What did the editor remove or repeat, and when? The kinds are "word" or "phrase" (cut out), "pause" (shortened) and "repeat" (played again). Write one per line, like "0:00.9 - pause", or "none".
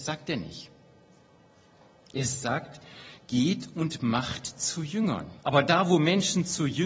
0:05.4 - pause